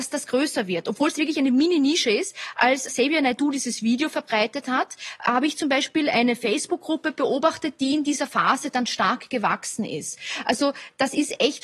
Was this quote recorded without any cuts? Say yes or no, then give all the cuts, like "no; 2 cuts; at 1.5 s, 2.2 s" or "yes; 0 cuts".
no; 1 cut; at 2.9 s